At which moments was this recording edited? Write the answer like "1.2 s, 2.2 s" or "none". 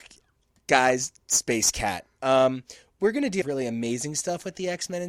3.4 s